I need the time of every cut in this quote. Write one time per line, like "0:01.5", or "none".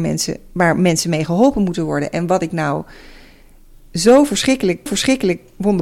0:04.9